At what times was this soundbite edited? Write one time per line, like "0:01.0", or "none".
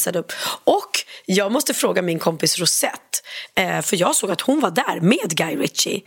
none